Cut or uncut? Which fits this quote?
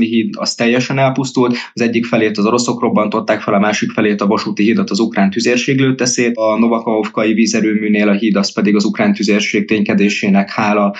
uncut